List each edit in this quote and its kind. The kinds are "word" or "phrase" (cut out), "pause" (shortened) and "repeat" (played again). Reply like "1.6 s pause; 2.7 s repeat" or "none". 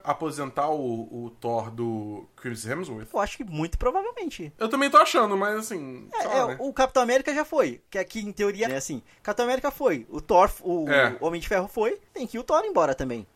8.6 s phrase